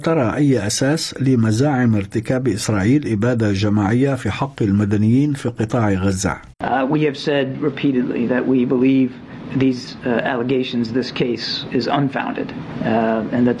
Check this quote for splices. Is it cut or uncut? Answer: cut